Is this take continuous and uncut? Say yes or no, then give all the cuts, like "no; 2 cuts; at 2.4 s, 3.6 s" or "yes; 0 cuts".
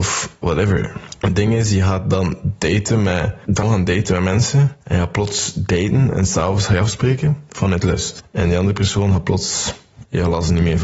no; 1 cut; at 3.6 s